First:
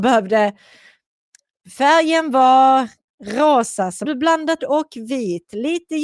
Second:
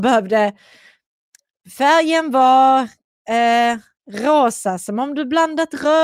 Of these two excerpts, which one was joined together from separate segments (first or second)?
first